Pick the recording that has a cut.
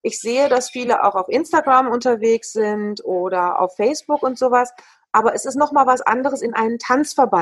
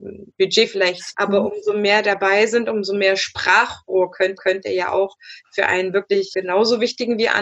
second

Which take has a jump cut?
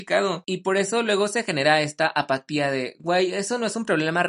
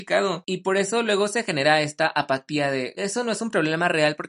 second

